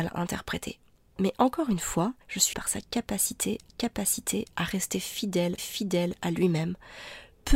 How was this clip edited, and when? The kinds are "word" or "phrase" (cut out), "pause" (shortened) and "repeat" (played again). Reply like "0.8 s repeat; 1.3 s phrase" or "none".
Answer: 2.2 s pause; 2.5 s word; 3.7 s repeat; 5.6 s repeat